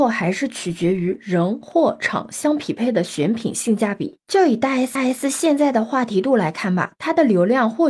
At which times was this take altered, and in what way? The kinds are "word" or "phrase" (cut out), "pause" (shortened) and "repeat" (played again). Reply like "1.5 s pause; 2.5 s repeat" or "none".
5.0 s repeat